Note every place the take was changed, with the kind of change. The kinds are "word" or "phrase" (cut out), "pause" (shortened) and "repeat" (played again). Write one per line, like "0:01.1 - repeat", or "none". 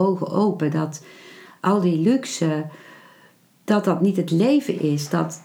none